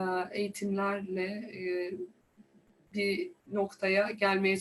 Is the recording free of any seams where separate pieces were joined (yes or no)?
no